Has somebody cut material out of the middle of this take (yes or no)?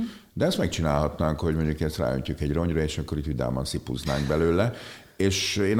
no